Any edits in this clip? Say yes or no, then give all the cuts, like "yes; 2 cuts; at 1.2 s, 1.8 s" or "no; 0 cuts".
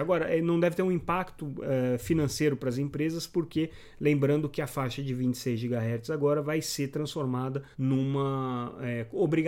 yes; 1 cut; at 7.7 s